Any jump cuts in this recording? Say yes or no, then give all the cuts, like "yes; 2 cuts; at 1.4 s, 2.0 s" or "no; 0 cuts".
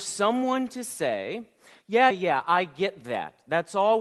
yes; 1 cut; at 2.1 s